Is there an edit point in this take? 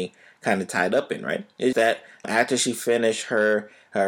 yes; 2 cuts; at 1.7 s, 2.2 s

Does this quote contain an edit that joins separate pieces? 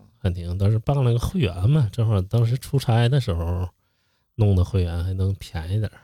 no; 0 cuts

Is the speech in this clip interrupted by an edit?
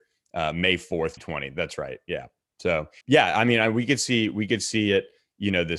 yes; 2 cuts; at 1.2 s, 3.0 s

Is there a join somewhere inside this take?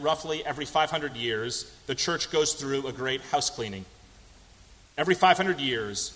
no; 0 cuts

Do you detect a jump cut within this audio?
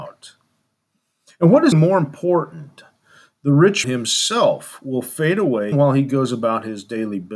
yes; 3 cuts; at 1.7 s, 3.8 s, 5.7 s

